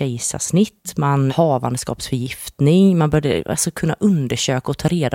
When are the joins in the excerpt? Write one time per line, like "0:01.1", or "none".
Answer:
0:01.3